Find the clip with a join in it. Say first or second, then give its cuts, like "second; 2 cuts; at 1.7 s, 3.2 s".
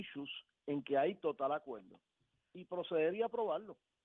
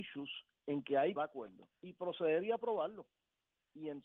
second; 2 cuts; at 1.2 s, 1.7 s